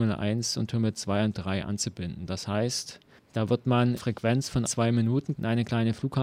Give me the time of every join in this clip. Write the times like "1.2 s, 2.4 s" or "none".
1.3 s, 3.2 s, 4.0 s, 4.7 s